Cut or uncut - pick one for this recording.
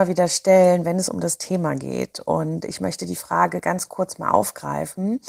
uncut